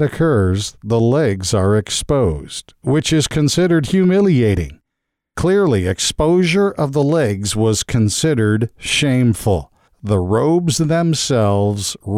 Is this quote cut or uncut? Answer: uncut